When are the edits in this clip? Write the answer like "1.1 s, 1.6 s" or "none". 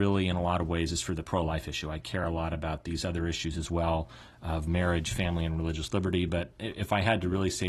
none